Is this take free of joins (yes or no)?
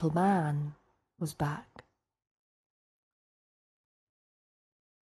yes